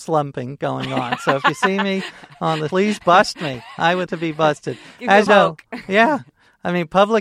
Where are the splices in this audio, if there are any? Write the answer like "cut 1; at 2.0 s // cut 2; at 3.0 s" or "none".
cut 1; at 2.7 s // cut 2; at 4.1 s // cut 3; at 5.3 s